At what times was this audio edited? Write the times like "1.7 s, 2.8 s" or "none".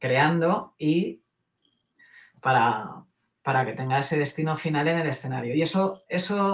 none